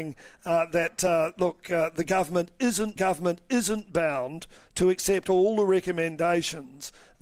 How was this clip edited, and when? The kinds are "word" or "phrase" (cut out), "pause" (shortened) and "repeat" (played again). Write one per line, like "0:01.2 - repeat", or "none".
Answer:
0:03.0 - repeat